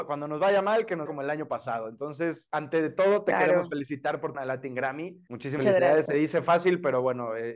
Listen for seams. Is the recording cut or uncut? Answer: cut